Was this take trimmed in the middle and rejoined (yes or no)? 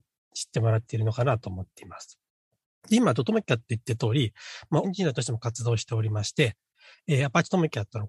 yes